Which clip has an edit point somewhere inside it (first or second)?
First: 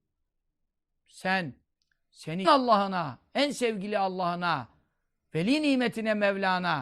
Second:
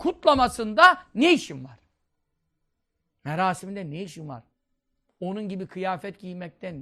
first